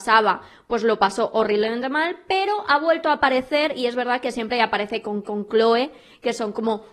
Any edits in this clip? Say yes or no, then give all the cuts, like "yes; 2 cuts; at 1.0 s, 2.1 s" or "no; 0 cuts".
yes; 1 cut; at 5.2 s